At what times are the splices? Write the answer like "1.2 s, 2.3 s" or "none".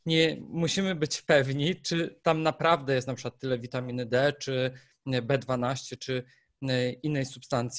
none